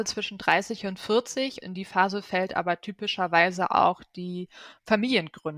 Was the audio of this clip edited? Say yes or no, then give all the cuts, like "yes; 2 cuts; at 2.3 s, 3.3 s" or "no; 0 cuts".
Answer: yes; 1 cut; at 1.6 s